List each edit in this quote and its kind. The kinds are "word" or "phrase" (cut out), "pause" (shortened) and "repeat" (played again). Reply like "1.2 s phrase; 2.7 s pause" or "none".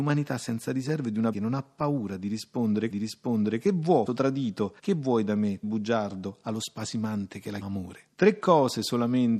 1.3 s word; 2.9 s repeat; 4.1 s word; 4.8 s pause; 5.6 s word; 7.6 s word; 8.1 s pause